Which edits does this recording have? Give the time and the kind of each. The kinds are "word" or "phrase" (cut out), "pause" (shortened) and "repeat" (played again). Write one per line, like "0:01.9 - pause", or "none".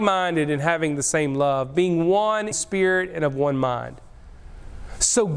0:02.5 - word